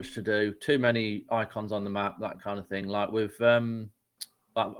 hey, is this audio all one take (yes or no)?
yes